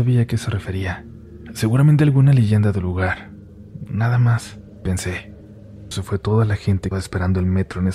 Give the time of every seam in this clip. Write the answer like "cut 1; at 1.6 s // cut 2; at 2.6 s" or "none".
cut 1; at 5.9 s // cut 2; at 6.9 s